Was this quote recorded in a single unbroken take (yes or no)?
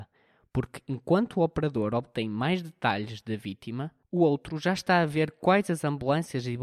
yes